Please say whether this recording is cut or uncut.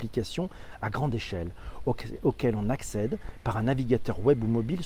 uncut